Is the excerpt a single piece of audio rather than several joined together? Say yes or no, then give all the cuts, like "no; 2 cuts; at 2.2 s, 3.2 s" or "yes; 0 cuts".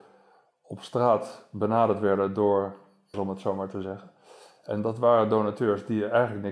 no; 1 cut; at 3.1 s